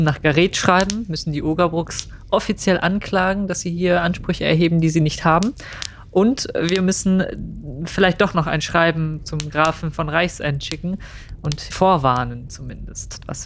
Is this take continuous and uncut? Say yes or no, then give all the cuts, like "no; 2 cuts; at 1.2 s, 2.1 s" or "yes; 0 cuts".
no; 1 cut; at 11.7 s